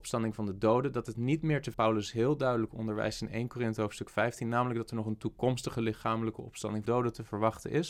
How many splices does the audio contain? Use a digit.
2